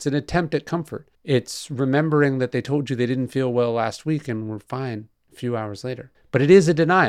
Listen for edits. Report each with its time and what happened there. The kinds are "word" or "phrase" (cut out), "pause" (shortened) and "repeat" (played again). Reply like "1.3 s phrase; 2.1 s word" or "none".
1.1 s pause; 5.1 s pause; 6.1 s pause